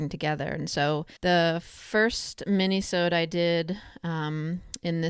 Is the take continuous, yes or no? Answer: no